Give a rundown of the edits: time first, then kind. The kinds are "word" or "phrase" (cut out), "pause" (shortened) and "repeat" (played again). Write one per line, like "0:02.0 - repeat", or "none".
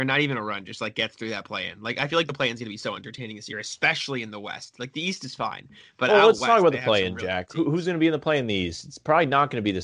none